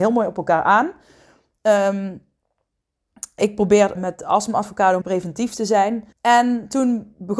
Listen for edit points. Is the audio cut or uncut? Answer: cut